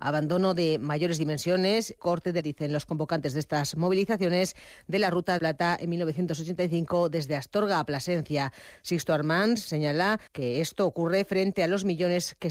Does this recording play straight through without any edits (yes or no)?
no